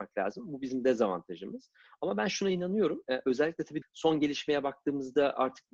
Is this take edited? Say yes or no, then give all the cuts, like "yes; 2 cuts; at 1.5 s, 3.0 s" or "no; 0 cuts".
yes; 1 cut; at 3.8 s